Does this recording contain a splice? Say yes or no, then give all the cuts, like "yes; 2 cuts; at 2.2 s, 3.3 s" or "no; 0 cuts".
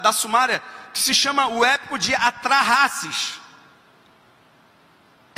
no; 0 cuts